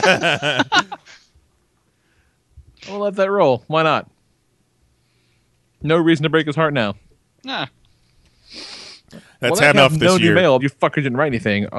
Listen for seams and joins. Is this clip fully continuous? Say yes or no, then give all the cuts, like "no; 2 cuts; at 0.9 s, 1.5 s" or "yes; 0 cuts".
no; 2 cuts; at 9.7 s, 10.6 s